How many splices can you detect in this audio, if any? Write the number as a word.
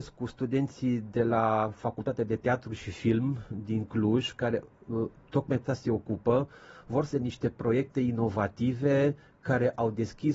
two